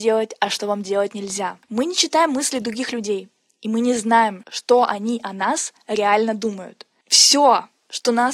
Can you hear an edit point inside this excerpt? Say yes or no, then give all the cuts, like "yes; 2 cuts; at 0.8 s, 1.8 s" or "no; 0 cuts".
no; 0 cuts